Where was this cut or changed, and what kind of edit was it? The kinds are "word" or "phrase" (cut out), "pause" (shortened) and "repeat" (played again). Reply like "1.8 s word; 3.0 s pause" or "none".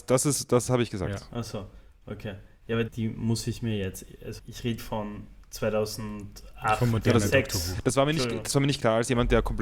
2.9 s word; 4.4 s word; 4.8 s word